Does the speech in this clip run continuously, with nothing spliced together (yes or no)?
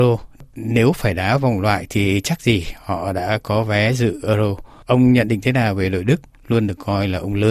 yes